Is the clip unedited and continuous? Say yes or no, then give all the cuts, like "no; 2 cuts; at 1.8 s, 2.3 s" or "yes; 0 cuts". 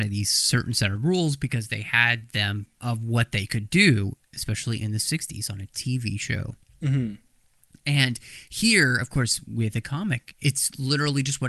no; 1 cut; at 2.8 s